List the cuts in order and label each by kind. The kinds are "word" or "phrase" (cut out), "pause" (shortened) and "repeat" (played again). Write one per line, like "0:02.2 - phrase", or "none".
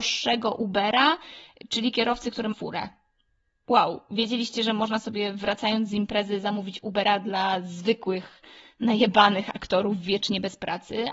0:02.5 - word